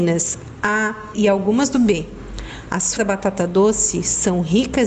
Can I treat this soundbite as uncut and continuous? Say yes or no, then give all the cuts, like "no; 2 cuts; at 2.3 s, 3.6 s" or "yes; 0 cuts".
no; 3 cuts; at 1.1 s, 1.7 s, 3.0 s